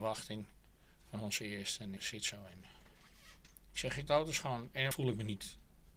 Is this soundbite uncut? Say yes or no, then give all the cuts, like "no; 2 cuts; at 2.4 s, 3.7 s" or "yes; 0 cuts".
no; 4 cuts; at 2.0 s, 3.5 s, 4.1 s, 4.9 s